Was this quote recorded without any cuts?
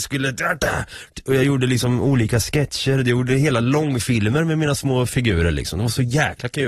yes; 0 cuts

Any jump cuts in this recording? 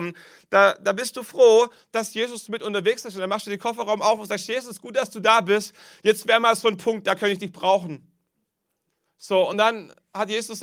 no; 0 cuts

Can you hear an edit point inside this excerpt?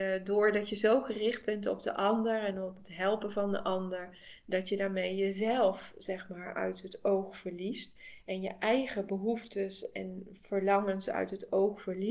no; 0 cuts

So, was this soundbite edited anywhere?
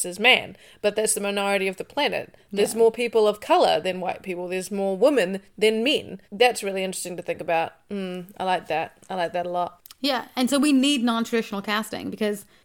yes; 1 cut; at 6.2 s

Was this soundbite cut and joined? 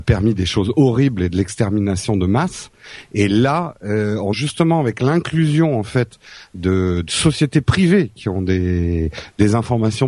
yes; 1 cut; at 4.3 s

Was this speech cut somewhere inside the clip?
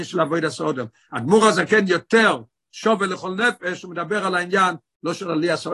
no; 0 cuts

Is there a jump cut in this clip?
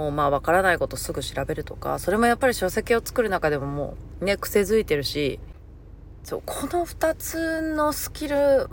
no; 0 cuts

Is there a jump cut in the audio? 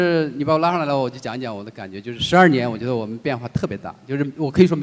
no; 0 cuts

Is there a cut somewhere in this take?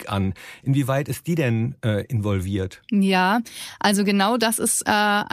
no; 0 cuts

